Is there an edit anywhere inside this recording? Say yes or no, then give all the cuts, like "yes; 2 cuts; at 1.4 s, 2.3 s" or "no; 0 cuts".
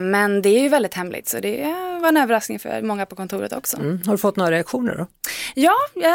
no; 0 cuts